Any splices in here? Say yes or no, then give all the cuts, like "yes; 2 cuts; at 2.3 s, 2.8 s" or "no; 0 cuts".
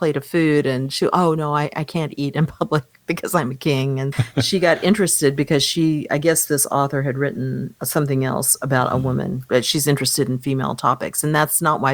yes; 2 cuts; at 4.1 s, 7.8 s